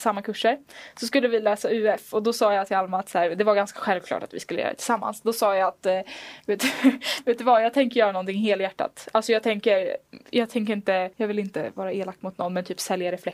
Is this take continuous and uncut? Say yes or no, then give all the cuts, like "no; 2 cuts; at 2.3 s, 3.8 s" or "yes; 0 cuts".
no; 1 cut; at 11.1 s